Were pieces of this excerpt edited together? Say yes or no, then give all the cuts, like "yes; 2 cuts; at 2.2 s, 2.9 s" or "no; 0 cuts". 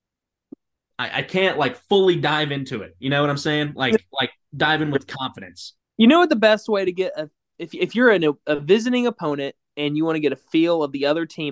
yes; 1 cut; at 5.8 s